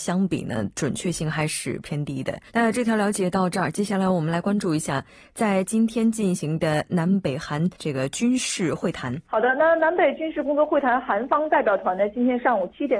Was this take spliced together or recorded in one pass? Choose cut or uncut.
cut